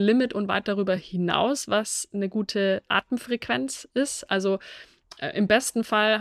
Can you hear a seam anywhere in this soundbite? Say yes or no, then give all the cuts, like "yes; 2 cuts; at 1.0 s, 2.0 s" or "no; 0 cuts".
no; 0 cuts